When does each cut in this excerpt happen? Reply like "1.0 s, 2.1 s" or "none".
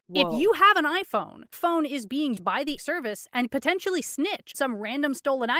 1.5 s, 2.4 s, 2.8 s, 3.5 s, 4.5 s